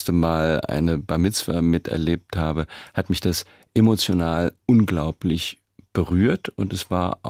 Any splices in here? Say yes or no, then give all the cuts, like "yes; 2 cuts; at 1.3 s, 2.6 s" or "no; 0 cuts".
no; 0 cuts